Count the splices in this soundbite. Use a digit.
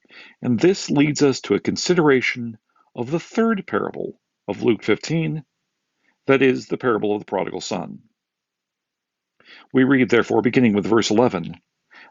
1